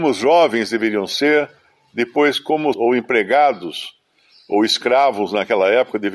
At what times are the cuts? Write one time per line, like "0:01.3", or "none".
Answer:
0:02.7

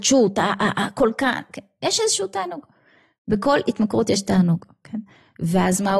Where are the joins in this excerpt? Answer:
none

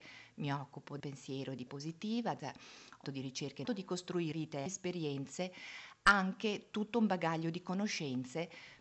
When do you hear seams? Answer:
0:01.0
0:01.7
0:02.4
0:03.0
0:03.6
0:04.3
0:04.7

